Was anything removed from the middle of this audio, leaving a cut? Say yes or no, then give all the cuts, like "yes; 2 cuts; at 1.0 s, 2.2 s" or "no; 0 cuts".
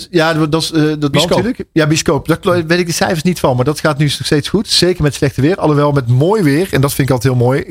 yes; 1 cut; at 1.1 s